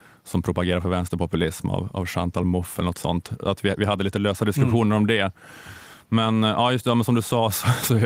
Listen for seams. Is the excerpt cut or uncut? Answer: uncut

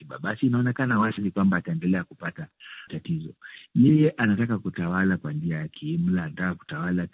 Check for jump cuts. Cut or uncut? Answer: cut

